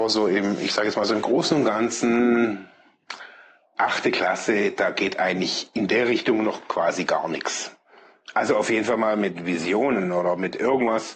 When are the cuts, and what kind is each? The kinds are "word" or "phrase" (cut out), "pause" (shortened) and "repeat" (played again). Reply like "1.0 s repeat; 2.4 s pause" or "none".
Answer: none